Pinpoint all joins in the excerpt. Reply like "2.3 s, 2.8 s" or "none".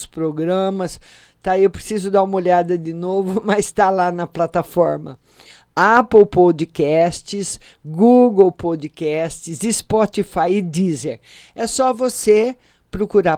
none